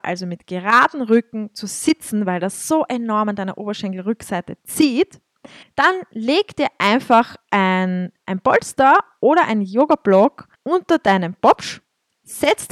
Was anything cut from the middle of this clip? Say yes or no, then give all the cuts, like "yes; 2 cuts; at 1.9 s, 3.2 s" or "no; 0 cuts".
yes; 2 cuts; at 5.6 s, 10.6 s